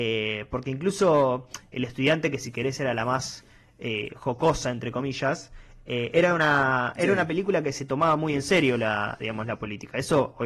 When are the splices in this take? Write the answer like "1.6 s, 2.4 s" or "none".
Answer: none

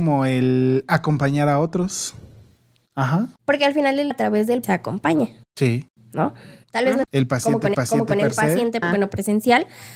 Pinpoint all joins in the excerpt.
3.4 s, 4.1 s, 4.6 s, 5.4 s, 7.0 s, 7.7 s, 8.8 s

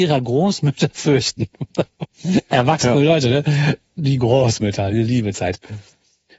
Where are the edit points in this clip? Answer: none

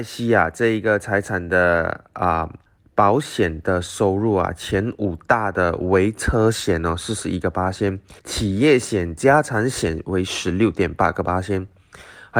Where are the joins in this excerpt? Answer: 2.7 s, 8.2 s

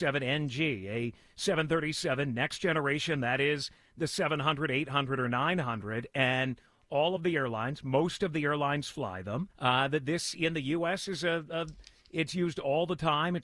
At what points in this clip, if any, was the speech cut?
9.5 s

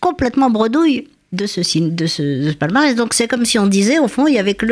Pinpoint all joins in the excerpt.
none

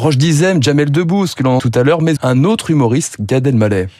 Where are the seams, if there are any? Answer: 1.6 s, 2.2 s

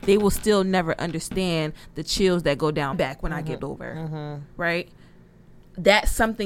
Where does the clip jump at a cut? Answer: 2.9 s, 3.6 s

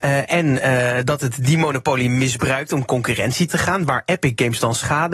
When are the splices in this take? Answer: 3.5 s

